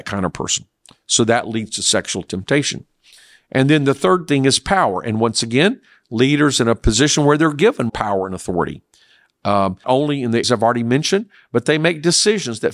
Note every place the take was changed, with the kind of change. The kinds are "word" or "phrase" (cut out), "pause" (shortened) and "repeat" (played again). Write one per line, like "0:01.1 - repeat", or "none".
0:07.9 - word
0:09.8 - word
0:10.4 - word